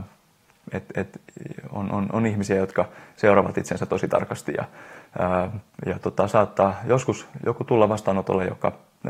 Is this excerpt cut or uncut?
uncut